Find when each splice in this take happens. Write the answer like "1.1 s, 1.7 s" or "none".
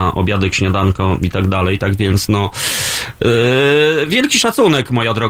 none